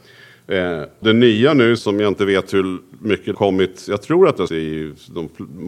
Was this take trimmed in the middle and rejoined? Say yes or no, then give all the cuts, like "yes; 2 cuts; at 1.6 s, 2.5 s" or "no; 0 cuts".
yes; 4 cuts; at 1.0 s, 1.8 s, 3.3 s, 4.5 s